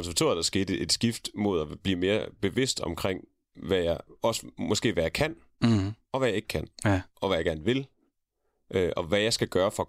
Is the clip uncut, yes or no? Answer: yes